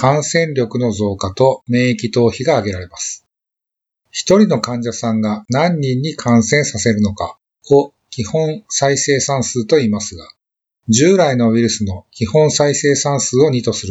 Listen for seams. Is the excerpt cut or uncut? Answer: uncut